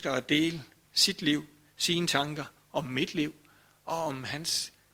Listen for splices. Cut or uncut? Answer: uncut